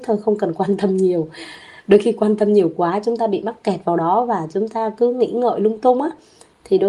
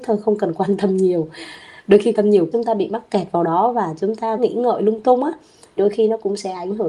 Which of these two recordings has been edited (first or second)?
second